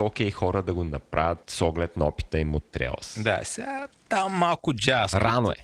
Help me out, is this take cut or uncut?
uncut